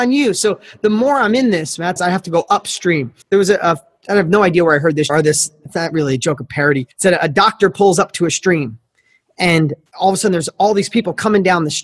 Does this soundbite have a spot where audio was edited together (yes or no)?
yes